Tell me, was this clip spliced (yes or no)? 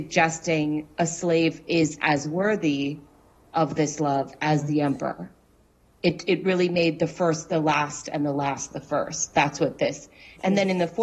no